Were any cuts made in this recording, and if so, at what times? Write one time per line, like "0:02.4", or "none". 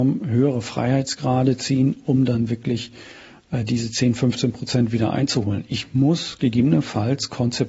none